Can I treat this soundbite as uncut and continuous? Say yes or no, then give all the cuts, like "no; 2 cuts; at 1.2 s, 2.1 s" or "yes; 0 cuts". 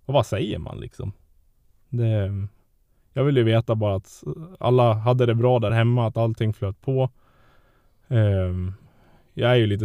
yes; 0 cuts